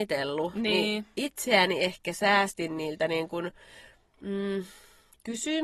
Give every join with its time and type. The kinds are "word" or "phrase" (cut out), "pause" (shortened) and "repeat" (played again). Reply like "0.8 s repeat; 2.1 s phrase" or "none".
none